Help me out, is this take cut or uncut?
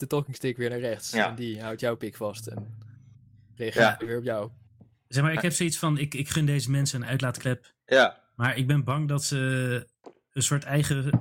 uncut